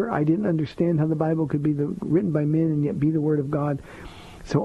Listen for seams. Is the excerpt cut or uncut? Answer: uncut